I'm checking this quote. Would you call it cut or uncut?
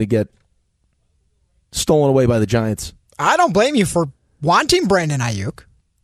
uncut